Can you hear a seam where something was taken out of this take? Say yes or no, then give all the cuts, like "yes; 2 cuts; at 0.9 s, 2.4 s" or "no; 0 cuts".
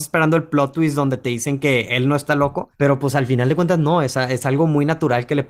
yes; 1 cut; at 2.7 s